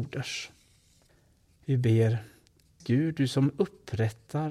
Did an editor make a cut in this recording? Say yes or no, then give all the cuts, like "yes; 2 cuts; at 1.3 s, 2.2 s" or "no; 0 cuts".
yes; 2 cuts; at 1.1 s, 2.8 s